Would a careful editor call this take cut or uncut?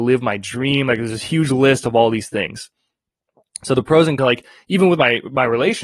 cut